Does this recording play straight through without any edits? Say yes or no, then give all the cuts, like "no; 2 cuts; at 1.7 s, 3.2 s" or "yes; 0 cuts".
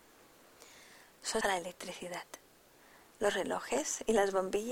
no; 1 cut; at 1.4 s